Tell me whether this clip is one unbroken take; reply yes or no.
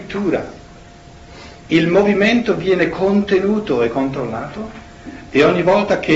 yes